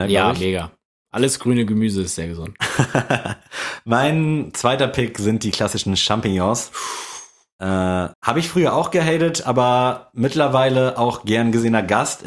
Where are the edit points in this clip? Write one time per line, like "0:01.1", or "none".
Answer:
0:08.1